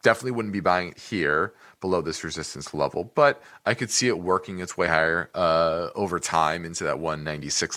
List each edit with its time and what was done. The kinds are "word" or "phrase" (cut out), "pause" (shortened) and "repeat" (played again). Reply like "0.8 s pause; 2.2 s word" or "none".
none

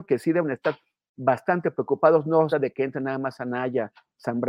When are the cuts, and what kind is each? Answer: 2.5 s phrase

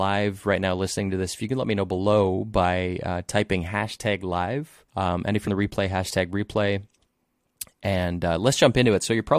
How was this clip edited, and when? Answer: 4.9 s pause; 5.5 s phrase

